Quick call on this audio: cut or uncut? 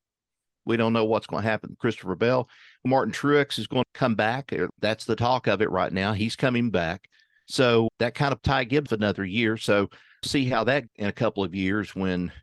cut